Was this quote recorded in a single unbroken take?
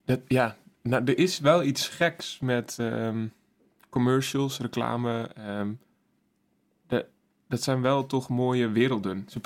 yes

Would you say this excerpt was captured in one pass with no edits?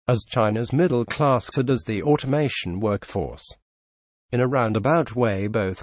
no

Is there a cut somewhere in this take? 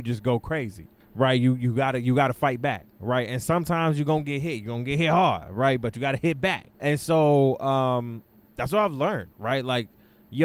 yes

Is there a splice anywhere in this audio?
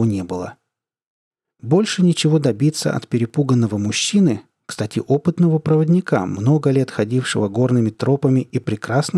no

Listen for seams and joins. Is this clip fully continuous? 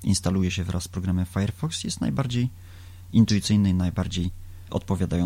yes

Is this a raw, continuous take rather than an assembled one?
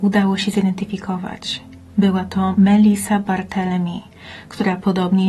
yes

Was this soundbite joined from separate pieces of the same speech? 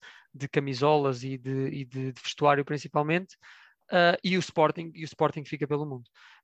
no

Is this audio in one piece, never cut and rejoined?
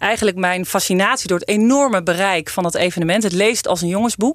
yes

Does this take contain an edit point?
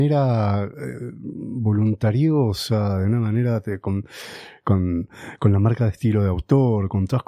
no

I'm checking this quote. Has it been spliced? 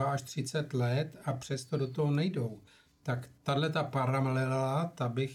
no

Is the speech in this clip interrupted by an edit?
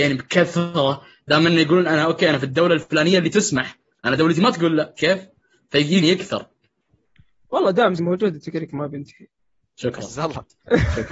yes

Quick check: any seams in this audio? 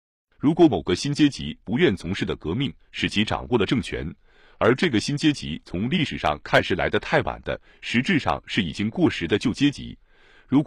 no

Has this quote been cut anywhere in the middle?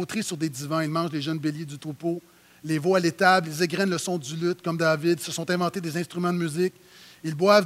no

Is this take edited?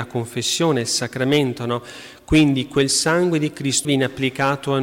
yes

